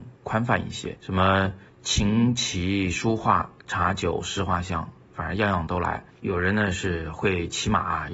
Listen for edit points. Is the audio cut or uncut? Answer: cut